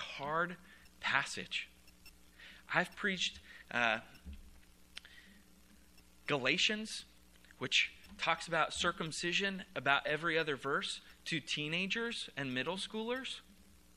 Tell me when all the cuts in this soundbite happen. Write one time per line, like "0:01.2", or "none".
none

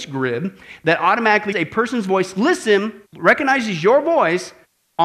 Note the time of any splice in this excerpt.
0:01.5
0:03.1

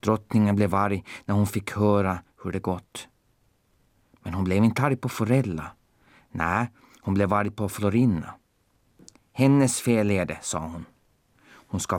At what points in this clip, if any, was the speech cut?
none

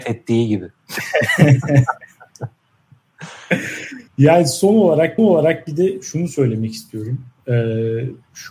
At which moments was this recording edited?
0:04.1
0:05.2

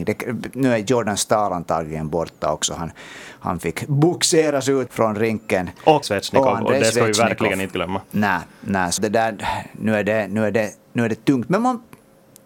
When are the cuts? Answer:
0:04.9
0:06.0
0:09.0

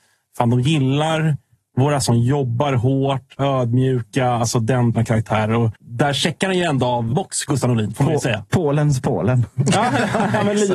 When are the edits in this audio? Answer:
0:02.0
0:03.4
0:04.9
0:05.8
0:07.1

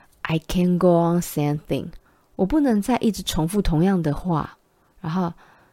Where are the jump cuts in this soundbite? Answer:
0:01.2
0:02.1

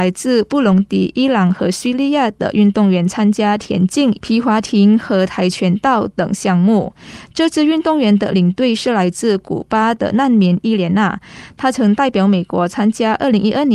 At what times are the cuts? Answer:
0:04.2

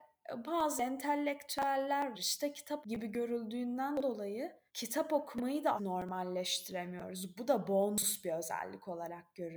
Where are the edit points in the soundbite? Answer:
0:02.1
0:02.8
0:04.7
0:05.8

